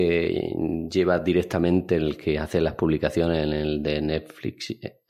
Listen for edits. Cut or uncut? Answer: uncut